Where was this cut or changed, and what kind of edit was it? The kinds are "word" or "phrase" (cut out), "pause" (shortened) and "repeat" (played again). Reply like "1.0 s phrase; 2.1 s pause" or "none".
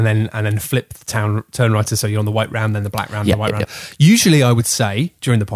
none